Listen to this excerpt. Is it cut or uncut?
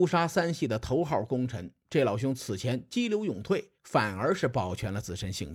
cut